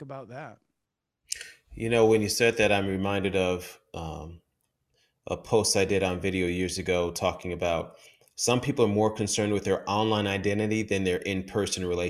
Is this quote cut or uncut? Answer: uncut